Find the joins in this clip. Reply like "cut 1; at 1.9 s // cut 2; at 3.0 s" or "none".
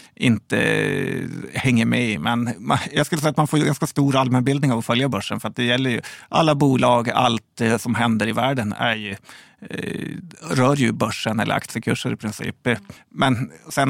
cut 1; at 13.0 s